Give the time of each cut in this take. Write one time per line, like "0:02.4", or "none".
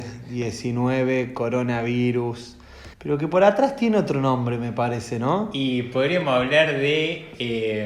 0:02.9